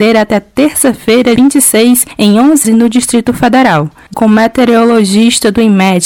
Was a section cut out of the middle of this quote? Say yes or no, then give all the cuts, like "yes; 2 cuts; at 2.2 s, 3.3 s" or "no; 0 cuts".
yes; 3 cuts; at 1.4 s, 2.6 s, 4.1 s